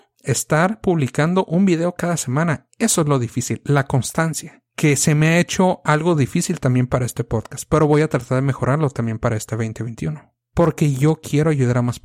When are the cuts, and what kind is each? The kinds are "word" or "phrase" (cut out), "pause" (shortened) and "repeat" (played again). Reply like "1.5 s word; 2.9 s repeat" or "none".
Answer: none